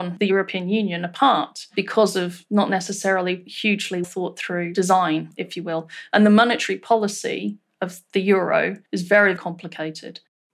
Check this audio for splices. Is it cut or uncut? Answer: cut